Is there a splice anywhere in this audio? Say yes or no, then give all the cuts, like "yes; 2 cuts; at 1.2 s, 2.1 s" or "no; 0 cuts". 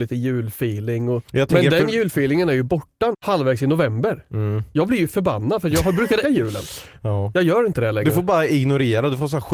yes; 3 cuts; at 1.3 s, 3.1 s, 6.2 s